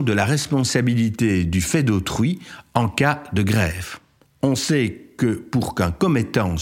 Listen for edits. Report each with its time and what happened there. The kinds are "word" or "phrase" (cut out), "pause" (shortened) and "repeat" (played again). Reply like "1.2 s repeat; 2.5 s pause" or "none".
none